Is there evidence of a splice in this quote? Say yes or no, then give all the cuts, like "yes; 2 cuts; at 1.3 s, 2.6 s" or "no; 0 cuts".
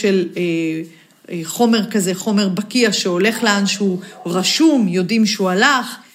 no; 0 cuts